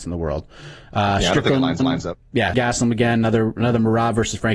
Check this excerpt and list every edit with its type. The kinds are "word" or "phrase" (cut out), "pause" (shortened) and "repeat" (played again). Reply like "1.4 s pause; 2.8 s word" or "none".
1.8 s repeat; 2.5 s word